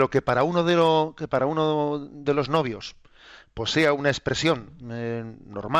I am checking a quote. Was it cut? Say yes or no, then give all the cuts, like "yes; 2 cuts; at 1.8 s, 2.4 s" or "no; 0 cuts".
no; 0 cuts